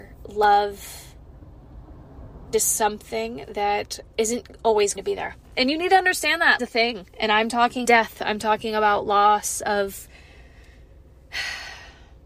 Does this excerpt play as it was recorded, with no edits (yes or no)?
no